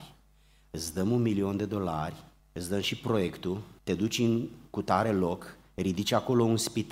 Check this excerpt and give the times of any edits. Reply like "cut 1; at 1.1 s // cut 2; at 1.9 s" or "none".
cut 1; at 2.4 s // cut 2; at 3.8 s